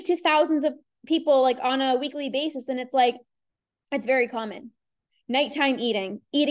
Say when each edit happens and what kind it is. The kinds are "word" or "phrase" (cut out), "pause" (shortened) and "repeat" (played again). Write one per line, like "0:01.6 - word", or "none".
none